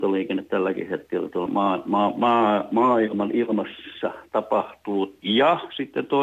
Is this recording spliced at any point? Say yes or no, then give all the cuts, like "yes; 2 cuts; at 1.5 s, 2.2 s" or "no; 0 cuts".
yes; 1 cut; at 1.5 s